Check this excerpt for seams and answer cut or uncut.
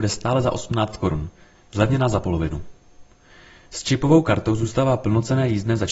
uncut